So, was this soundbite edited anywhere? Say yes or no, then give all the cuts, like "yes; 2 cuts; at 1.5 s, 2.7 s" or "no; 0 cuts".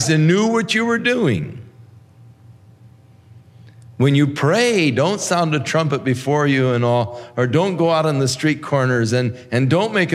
no; 0 cuts